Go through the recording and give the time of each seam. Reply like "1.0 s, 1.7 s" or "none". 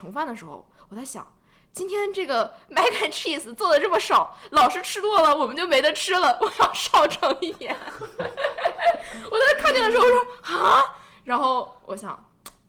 none

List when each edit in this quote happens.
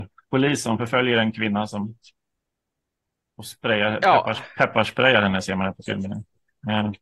none

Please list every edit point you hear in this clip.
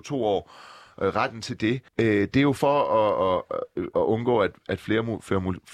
1.9 s

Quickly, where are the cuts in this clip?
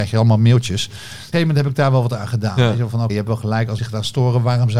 1.3 s, 3.1 s, 3.8 s

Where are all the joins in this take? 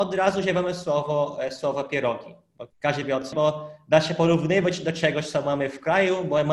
2.7 s, 3.3 s

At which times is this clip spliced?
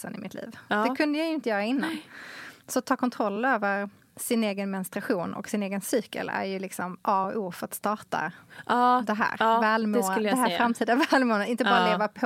none

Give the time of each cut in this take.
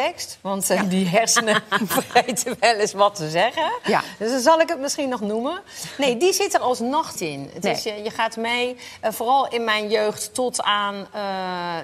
7.2 s

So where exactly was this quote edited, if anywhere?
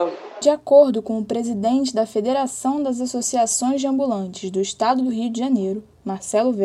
none

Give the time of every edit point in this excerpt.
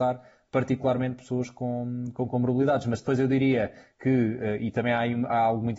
none

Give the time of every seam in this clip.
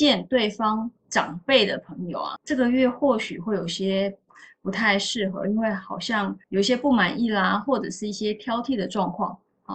2.4 s, 6.4 s

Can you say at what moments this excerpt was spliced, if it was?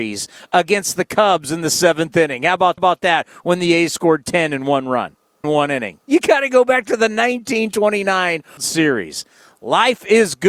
2.8 s, 5.4 s, 6.0 s, 8.6 s

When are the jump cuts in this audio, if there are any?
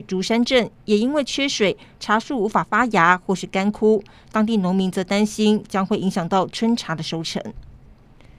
none

